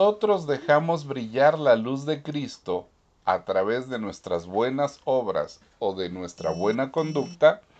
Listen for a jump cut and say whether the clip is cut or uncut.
uncut